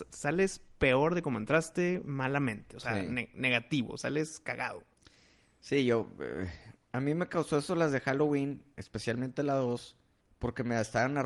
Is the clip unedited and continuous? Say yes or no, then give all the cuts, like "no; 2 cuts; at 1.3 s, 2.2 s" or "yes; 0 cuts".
yes; 0 cuts